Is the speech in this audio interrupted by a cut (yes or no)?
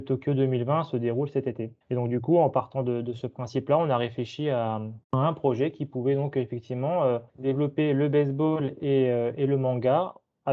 yes